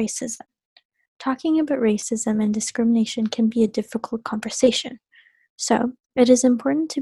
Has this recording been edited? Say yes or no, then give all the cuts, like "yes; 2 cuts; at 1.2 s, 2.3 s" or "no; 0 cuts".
no; 0 cuts